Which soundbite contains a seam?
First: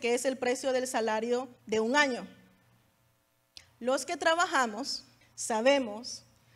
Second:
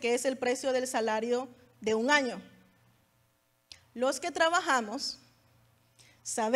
first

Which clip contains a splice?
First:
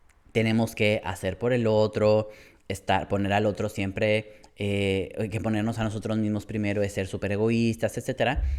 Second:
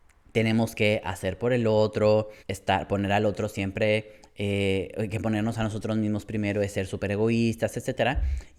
second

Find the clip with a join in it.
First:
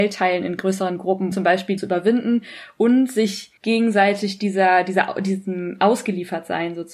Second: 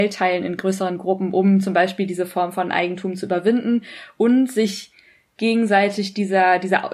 first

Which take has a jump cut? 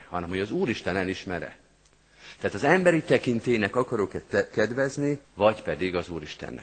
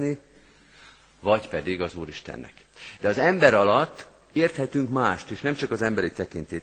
first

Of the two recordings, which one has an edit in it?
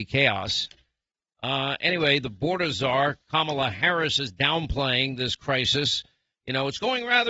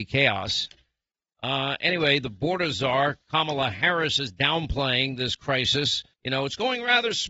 second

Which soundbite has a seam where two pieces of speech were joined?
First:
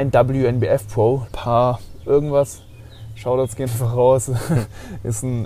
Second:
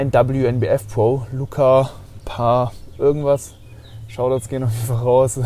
first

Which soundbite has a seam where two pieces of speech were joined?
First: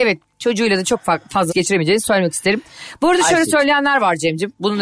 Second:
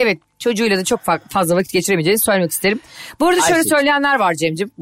first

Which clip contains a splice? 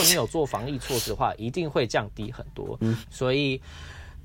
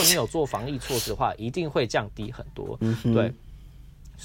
first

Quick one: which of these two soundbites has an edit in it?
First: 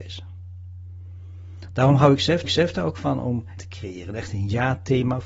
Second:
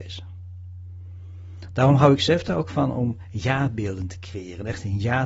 first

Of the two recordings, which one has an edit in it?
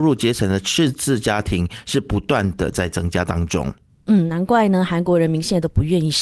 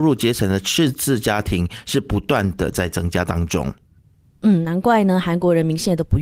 first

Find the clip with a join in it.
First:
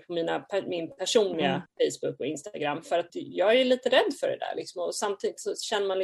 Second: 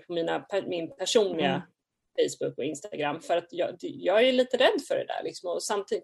first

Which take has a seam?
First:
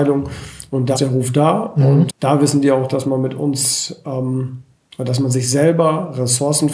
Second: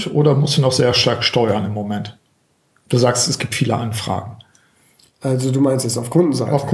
first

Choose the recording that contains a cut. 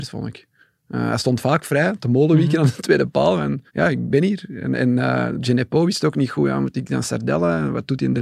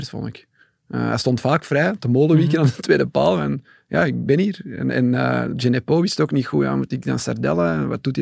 first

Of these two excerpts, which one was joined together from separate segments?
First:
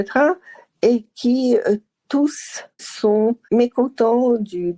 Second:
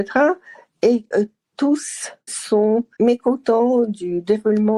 second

